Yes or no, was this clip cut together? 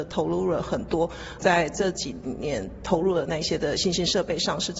yes